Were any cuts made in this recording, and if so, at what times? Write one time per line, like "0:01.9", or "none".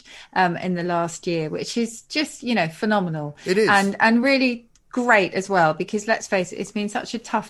none